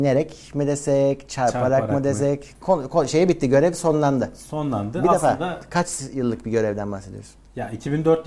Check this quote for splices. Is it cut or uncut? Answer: uncut